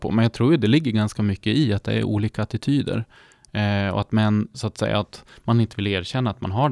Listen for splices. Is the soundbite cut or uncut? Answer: uncut